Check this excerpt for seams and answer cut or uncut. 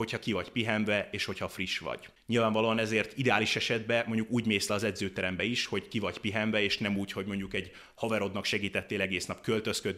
uncut